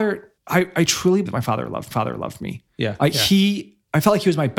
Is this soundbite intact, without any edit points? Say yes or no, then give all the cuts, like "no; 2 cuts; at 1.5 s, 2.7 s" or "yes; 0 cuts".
no; 2 cuts; at 1.3 s, 1.9 s